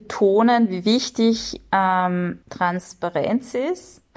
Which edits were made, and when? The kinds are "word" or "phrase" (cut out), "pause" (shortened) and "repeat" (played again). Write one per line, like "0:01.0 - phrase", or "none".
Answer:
0:02.4 - pause